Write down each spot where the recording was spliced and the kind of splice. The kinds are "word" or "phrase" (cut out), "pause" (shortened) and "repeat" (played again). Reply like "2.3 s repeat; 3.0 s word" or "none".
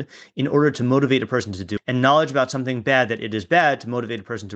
1.8 s word